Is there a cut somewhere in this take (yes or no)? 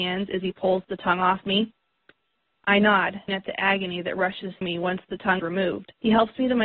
yes